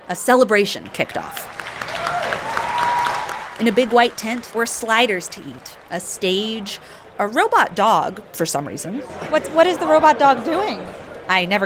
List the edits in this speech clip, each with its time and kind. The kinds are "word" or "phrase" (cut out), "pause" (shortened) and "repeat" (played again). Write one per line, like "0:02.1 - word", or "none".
0:04.5 - word